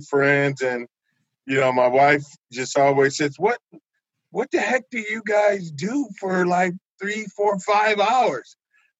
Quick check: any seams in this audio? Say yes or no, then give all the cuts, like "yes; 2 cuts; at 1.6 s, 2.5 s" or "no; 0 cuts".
no; 0 cuts